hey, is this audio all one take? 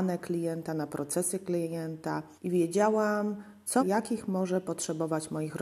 no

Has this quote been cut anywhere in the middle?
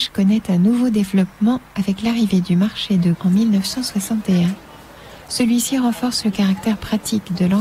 yes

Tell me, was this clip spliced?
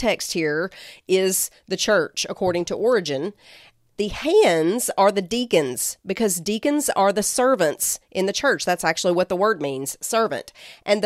no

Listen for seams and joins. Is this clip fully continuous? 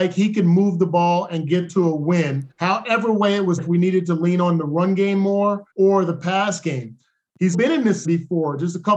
no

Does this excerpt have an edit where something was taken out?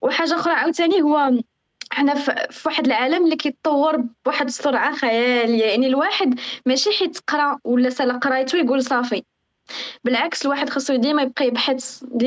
yes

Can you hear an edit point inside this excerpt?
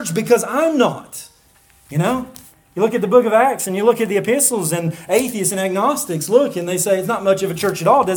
no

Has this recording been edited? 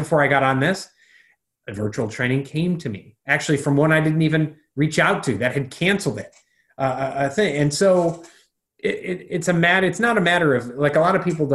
no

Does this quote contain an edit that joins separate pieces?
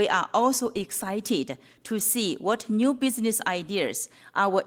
no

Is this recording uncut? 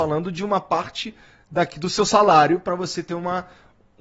yes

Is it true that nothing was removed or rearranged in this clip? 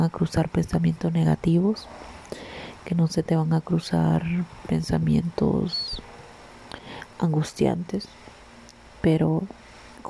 yes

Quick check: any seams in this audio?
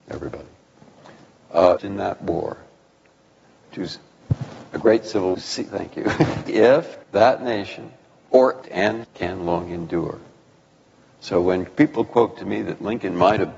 yes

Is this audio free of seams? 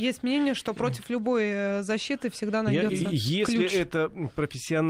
yes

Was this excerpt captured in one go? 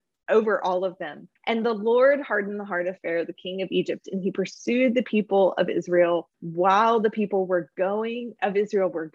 no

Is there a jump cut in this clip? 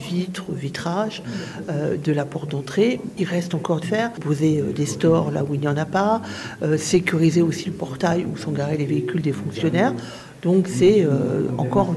yes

